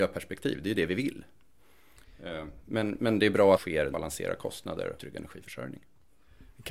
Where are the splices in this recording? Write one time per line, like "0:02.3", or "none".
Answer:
0:03.5
0:03.9
0:05.0